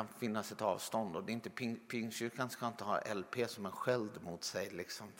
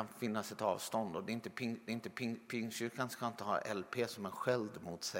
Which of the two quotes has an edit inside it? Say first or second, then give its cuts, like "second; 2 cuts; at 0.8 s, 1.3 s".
second; 1 cut; at 1.9 s